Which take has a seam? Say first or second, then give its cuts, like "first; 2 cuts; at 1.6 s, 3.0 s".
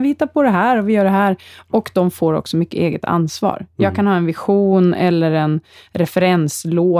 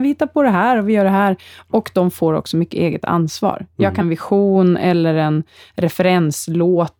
second; 1 cut; at 4.0 s